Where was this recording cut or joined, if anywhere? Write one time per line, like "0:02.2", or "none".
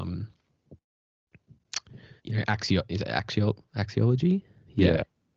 0:02.2